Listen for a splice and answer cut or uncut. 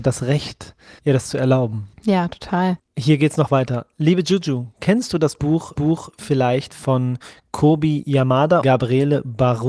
cut